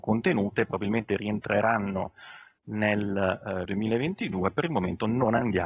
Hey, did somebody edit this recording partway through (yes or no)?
yes